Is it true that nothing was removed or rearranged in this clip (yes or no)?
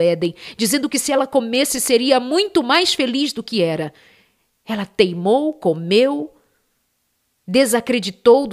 yes